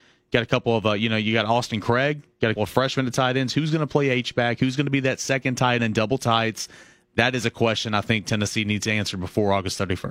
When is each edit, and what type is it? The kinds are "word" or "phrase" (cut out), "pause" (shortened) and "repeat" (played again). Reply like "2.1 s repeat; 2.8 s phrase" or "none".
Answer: 2.6 s word; 5.8 s word